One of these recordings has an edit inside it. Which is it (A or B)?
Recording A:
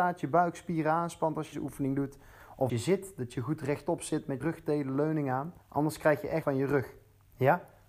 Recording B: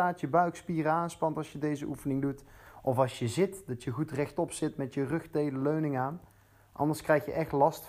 A